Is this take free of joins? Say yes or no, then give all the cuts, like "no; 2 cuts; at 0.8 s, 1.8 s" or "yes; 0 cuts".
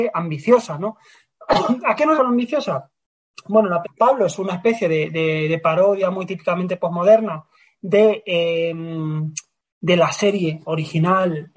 no; 2 cuts; at 2.2 s, 3.8 s